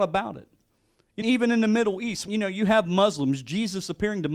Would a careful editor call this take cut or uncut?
cut